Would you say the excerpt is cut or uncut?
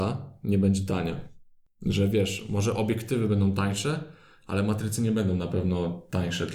uncut